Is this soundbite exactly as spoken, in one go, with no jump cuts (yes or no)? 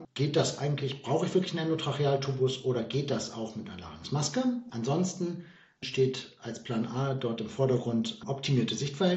yes